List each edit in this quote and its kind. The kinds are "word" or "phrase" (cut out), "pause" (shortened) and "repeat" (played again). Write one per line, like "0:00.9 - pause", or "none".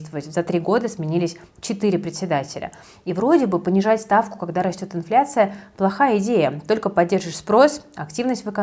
none